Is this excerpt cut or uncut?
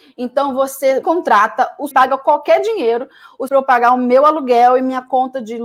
cut